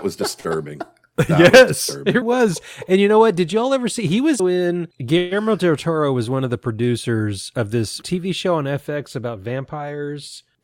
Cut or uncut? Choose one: cut